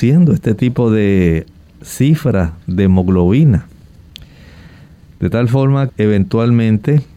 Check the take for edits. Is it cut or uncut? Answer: cut